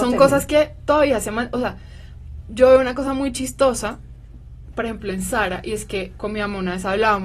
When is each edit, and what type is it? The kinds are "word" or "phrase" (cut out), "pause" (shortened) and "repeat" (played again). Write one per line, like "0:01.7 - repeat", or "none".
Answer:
none